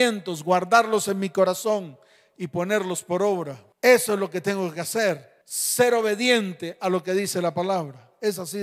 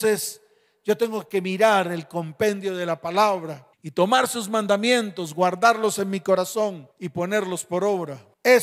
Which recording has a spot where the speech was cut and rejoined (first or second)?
second